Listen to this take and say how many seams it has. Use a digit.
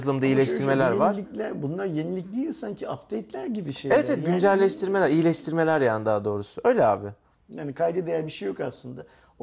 0